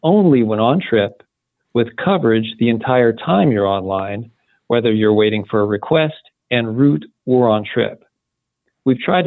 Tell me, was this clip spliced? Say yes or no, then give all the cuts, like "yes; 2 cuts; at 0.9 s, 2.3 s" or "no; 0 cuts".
no; 0 cuts